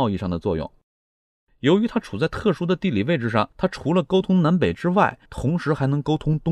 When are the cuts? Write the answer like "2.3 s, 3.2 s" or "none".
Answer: 3.5 s, 5.3 s